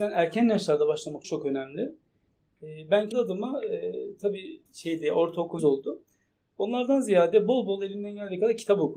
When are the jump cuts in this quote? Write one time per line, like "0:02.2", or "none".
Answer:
0:01.2
0:03.1
0:04.7
0:05.6